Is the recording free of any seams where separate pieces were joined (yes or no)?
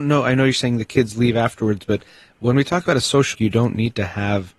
no